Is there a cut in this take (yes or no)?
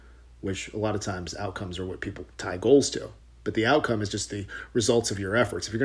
yes